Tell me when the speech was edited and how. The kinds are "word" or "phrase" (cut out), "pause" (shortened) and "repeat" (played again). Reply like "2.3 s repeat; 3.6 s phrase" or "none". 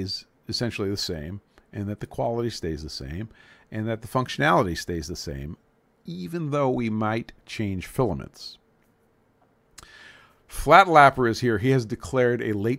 none

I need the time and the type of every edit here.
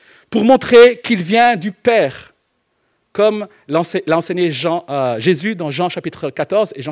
none

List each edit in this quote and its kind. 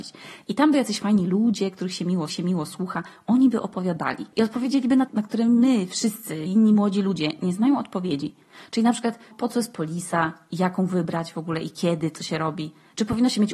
2.3 s repeat; 4.3 s pause; 5.1 s phrase; 6.5 s word; 9.3 s word

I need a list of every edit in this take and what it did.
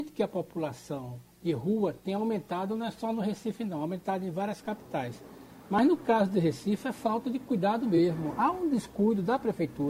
1.3 s pause

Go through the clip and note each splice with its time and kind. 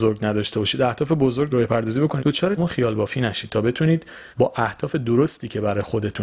1.5 s phrase; 2.2 s word; 2.6 s word; 4.3 s pause

